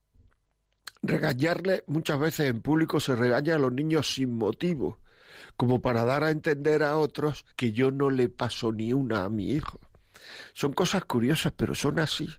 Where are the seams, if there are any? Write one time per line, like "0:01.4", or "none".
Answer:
0:07.5